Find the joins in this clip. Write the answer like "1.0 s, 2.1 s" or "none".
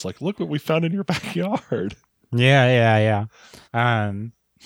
3.6 s